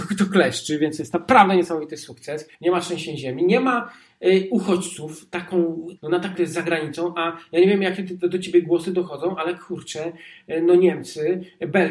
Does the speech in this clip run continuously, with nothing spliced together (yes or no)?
no